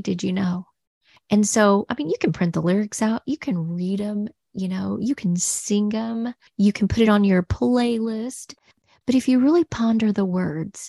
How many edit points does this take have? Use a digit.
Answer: 0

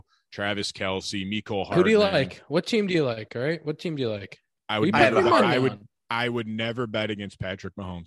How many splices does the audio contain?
1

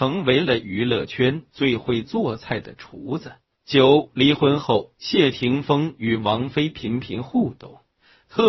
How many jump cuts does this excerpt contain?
1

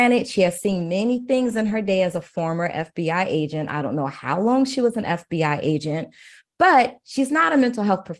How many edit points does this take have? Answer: 0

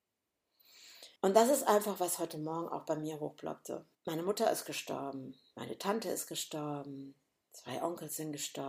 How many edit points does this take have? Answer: 2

